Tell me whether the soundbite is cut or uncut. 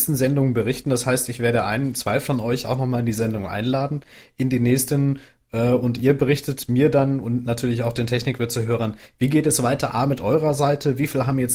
uncut